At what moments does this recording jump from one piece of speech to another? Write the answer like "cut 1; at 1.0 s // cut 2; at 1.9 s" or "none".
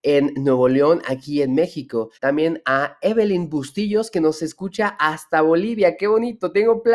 cut 1; at 2.1 s